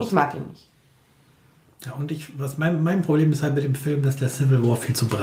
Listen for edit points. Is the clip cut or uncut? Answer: uncut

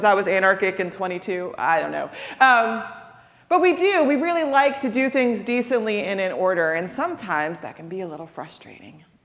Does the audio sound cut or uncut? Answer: uncut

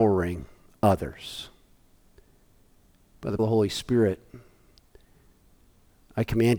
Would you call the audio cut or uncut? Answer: cut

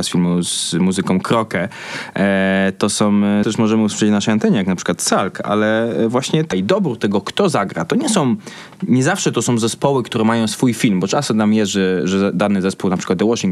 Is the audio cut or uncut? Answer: cut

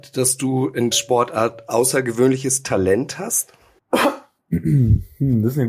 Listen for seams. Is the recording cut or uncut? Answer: cut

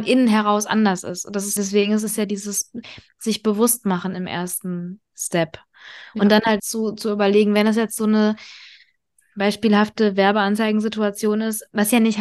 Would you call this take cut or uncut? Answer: cut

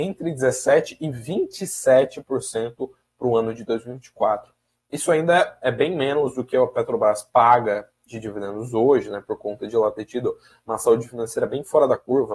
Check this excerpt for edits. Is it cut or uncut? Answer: uncut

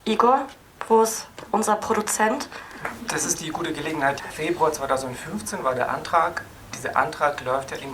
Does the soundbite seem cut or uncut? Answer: uncut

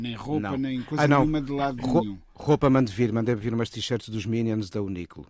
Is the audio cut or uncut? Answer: uncut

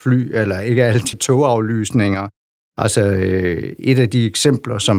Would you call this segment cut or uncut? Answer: cut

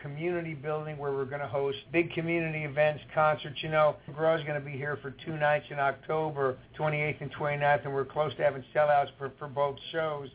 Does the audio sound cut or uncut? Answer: cut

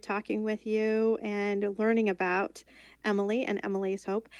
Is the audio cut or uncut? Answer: uncut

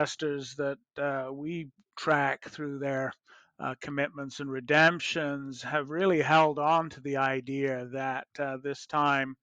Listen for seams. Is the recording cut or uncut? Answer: uncut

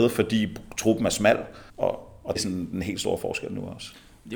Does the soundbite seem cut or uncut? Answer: cut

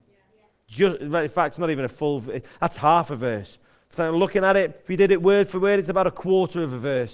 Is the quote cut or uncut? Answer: uncut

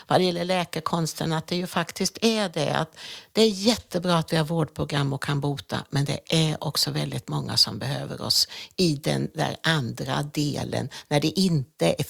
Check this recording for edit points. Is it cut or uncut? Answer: uncut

